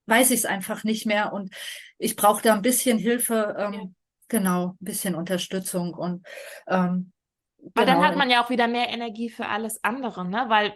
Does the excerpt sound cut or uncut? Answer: uncut